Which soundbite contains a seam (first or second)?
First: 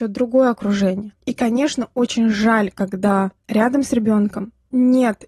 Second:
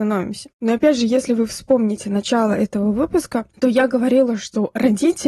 second